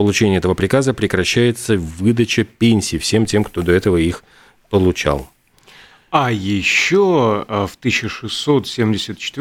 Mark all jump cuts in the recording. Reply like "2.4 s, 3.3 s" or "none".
none

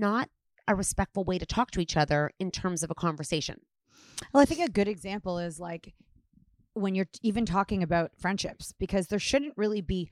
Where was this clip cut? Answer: none

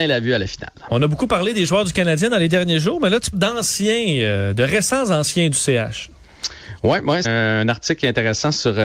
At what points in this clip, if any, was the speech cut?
3.3 s, 7.2 s

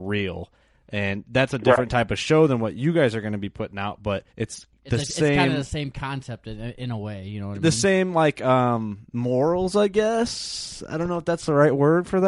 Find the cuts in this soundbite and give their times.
4.3 s

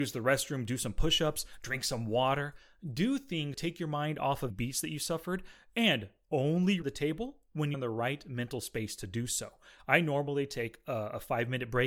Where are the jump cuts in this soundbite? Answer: 3.5 s, 4.5 s, 6.8 s, 7.7 s

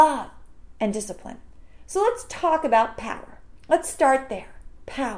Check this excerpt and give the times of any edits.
none

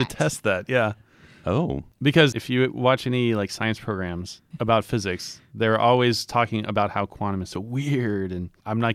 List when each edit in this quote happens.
none

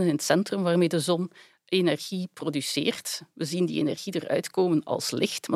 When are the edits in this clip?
none

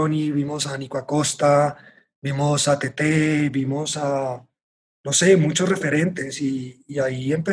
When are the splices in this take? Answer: none

